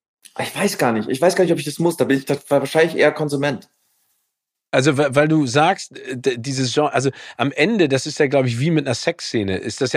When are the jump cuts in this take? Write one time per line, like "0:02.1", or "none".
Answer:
none